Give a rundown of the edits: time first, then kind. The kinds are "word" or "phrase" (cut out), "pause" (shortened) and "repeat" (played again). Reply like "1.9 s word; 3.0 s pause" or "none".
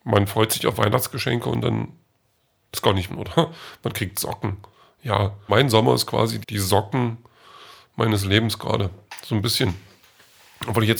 3.1 s word; 5.5 s word; 6.4 s word